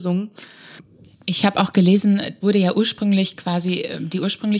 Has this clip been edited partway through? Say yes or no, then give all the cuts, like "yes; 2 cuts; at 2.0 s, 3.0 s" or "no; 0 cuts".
yes; 1 cut; at 2.4 s